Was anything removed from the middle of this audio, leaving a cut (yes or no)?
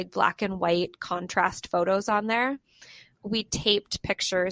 no